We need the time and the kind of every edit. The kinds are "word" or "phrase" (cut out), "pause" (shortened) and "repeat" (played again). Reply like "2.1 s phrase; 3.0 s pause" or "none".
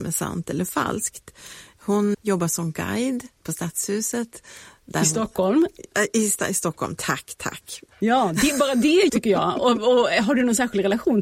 2.1 s word; 9.1 s word

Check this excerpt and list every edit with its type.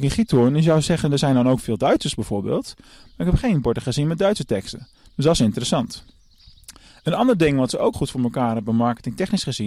7.9 s word

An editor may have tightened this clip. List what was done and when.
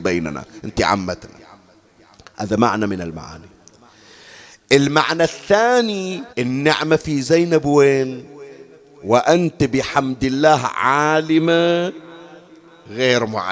6.3 s pause

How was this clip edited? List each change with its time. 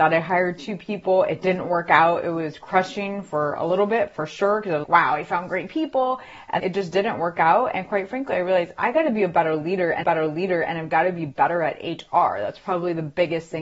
4.8 s word; 6.6 s word; 10.0 s repeat

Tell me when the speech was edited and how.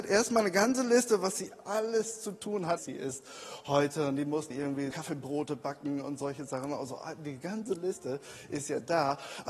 2.8 s phrase; 4.5 s word; 4.9 s word

